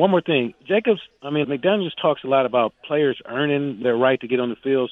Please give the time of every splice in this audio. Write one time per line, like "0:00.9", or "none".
0:01.4
0:03.8